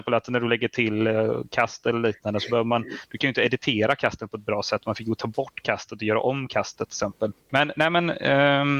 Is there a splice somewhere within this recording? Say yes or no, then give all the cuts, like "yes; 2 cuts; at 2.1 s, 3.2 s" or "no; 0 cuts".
yes; 1 cut; at 7.4 s